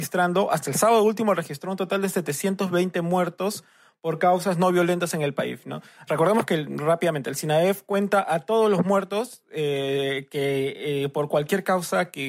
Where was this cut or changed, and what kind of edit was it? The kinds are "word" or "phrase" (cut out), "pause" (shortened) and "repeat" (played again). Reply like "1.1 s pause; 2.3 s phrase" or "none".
none